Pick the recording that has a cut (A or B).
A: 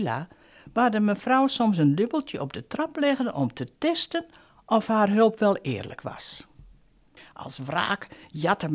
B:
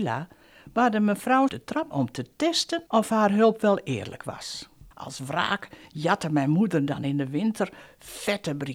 B